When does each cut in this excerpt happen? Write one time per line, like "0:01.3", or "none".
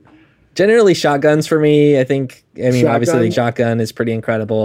0:03.3

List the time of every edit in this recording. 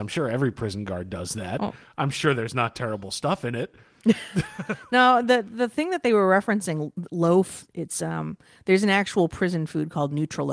none

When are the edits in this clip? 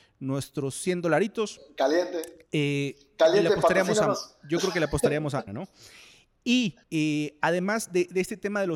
0:05.5
0:06.8

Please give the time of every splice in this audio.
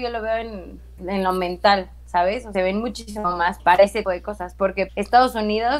0:01.0
0:02.5
0:03.6
0:04.0
0:04.9

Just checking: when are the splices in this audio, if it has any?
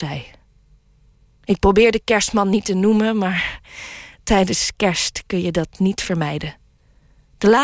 none

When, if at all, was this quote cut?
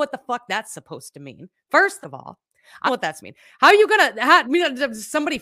0:02.0
0:02.9
0:03.2
0:04.4

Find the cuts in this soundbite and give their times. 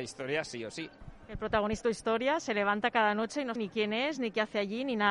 0:01.8
0:03.6

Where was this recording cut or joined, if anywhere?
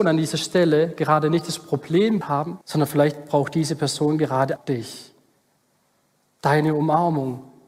0:02.2
0:02.6
0:04.6

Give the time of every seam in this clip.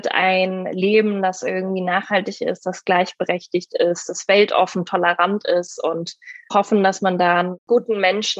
0:06.5

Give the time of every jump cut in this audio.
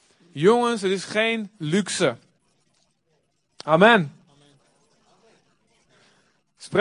none

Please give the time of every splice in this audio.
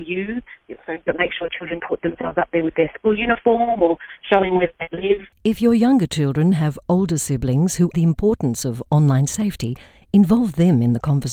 0:01.8
0:05.3
0:07.9

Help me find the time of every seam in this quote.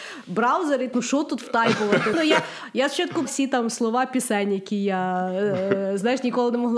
0:00.9
0:02.1
0:03.2

